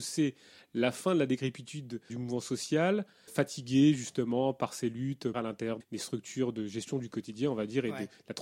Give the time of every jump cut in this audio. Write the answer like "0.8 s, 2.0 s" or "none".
2.1 s, 3.3 s, 5.3 s, 5.8 s